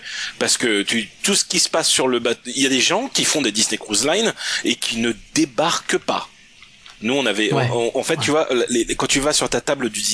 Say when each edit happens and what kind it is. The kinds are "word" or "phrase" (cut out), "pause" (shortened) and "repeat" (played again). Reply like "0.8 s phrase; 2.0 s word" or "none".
none